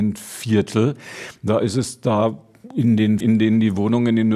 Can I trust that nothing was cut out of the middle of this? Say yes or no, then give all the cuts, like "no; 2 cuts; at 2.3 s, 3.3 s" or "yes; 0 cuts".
no; 1 cut; at 3.2 s